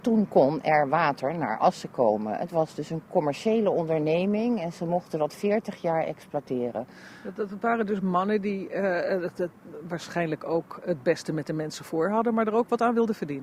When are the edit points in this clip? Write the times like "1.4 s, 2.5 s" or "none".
none